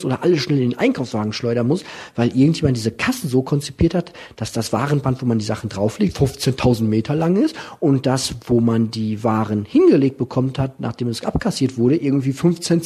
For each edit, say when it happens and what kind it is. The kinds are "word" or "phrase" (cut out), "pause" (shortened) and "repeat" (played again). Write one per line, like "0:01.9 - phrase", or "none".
none